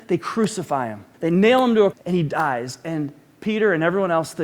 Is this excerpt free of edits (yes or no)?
no